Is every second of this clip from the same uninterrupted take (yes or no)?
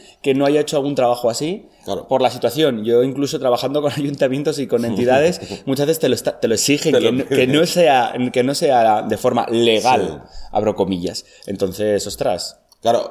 yes